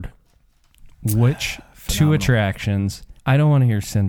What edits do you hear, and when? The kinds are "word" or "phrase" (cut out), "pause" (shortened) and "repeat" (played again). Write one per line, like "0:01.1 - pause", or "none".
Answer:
0:03.2 - pause